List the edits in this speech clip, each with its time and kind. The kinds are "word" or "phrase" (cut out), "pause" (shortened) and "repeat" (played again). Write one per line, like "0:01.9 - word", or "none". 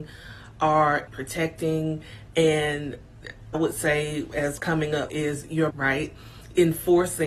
0:01.1 - word
0:03.5 - word
0:04.6 - word
0:05.1 - word
0:05.7 - word